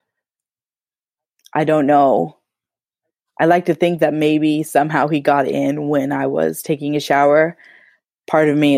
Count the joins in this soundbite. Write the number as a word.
zero